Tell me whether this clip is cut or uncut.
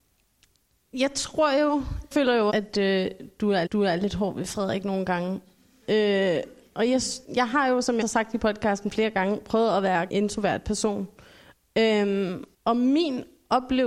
cut